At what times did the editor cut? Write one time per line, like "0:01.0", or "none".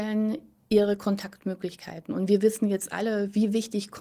none